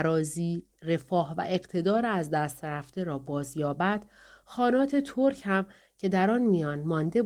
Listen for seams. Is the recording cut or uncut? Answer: uncut